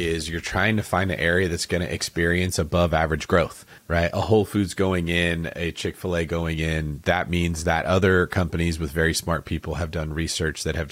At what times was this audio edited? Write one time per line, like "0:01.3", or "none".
0:03.8